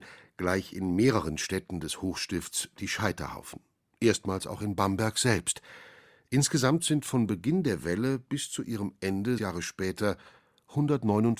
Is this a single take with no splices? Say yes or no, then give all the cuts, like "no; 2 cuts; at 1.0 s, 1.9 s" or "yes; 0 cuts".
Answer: no; 1 cut; at 9.4 s